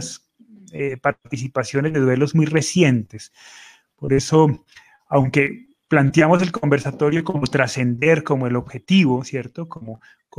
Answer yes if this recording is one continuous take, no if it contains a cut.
yes